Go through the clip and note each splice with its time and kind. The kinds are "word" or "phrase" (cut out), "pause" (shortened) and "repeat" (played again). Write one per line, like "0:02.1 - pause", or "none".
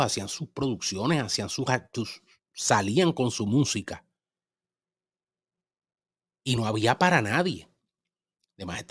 none